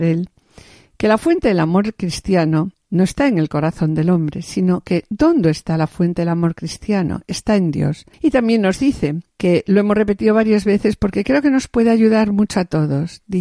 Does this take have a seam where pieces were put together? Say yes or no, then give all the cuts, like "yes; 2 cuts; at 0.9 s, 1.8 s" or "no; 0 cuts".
yes; 3 cuts; at 2.7 s, 8.1 s, 9.3 s